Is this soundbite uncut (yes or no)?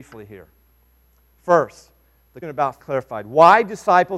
no